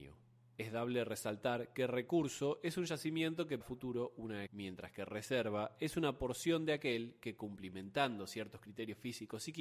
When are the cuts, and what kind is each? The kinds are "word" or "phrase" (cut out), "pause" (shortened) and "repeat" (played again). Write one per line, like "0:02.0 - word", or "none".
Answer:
0:03.6 - word
0:04.5 - word